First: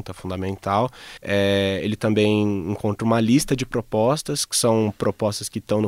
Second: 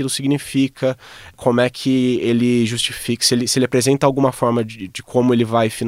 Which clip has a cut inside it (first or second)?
first